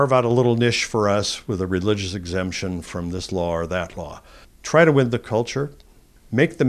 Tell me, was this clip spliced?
yes; 1 cut; at 4.4 s

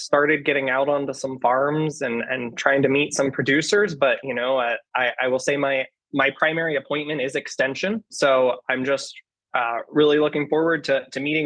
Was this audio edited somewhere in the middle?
no; 0 cuts

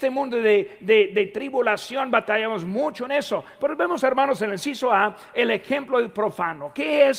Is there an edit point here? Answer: no; 0 cuts

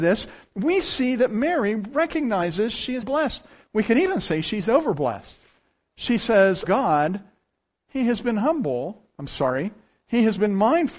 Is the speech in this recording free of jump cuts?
no; 2 cuts; at 3.0 s, 6.6 s

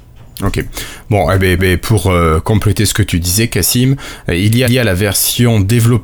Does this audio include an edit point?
yes; 2 cuts; at 1.6 s, 4.7 s

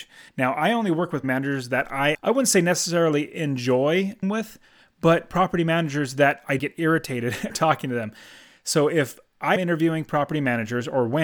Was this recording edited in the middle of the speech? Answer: yes; 6 cuts; at 1.2 s, 2.1 s, 4.2 s, 6.6 s, 7.5 s, 9.6 s

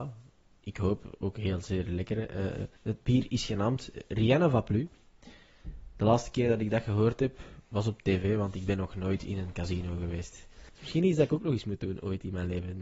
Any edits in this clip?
yes; 2 cuts; at 2.8 s, 7.6 s

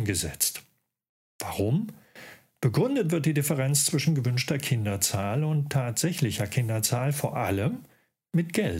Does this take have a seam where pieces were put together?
no; 0 cuts

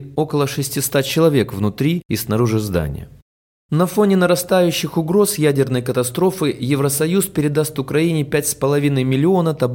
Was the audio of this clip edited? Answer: no; 0 cuts

